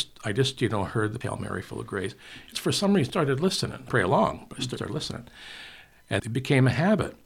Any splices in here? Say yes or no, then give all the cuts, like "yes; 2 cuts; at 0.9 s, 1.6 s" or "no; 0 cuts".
yes; 6 cuts; at 1.2 s, 2.5 s, 3.1 s, 3.9 s, 4.8 s, 6.2 s